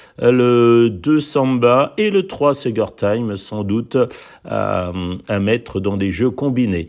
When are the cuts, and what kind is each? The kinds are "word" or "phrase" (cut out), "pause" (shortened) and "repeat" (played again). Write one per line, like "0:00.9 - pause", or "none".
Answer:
none